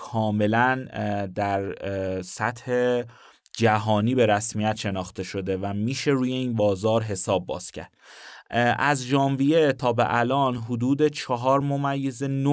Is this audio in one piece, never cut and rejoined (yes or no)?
yes